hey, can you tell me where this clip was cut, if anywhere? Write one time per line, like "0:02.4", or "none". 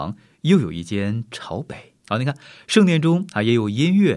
0:02.0